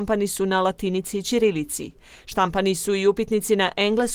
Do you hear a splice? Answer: no; 0 cuts

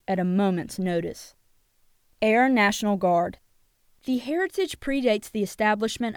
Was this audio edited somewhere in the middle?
no; 0 cuts

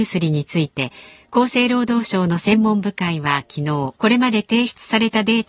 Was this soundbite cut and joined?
yes; 1 cut; at 4.0 s

